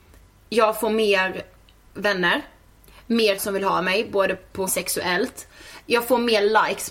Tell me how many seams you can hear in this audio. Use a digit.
2